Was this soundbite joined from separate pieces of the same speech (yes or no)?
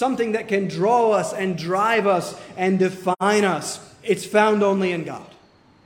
no